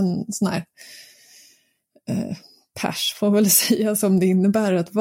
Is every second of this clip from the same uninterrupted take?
yes; 0 cuts

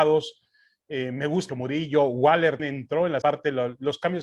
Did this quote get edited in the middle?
yes; 3 cuts; at 1.5 s, 2.6 s, 3.2 s

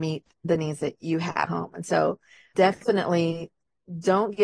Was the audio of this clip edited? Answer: yes; 2 cuts; at 1.5 s, 2.5 s

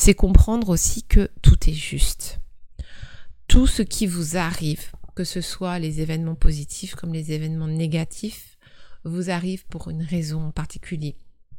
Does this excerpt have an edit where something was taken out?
yes; 1 cut; at 5.2 s

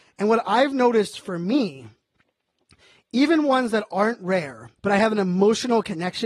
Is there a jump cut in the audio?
yes; 1 cut; at 4.8 s

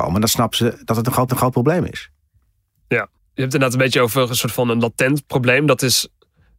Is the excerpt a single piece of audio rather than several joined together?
no; 2 cuts; at 1.3 s, 3.2 s

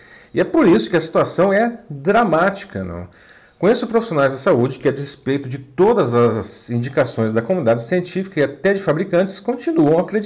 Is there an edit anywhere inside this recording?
no; 0 cuts

